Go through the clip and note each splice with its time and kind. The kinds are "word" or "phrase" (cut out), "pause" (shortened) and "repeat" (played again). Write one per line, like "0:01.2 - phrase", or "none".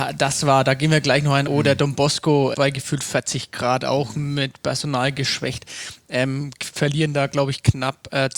0:01.5 - word
0:02.5 - word